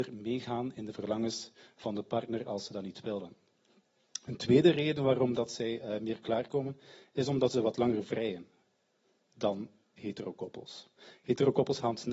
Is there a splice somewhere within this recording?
no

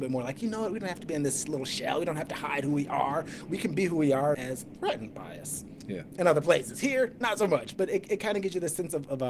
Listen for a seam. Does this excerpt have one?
yes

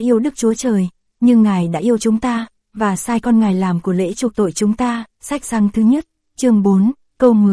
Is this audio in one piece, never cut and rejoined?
yes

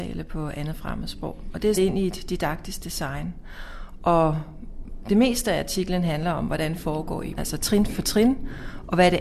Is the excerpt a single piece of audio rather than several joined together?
no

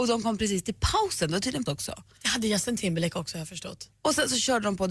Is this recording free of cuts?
no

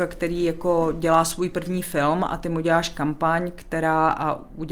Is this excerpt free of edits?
yes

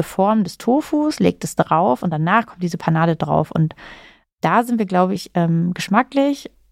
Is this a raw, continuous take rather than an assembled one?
yes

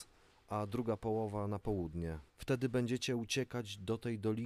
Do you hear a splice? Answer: yes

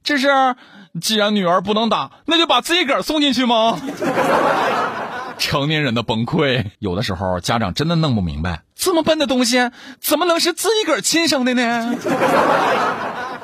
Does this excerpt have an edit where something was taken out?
yes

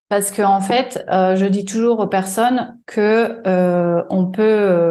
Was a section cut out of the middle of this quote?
no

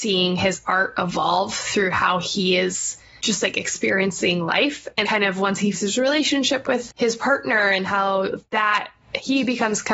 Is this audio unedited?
no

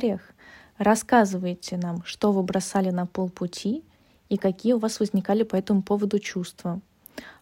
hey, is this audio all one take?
yes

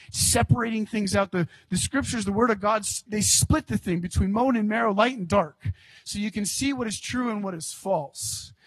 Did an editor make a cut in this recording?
yes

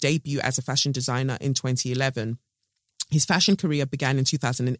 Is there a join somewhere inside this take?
no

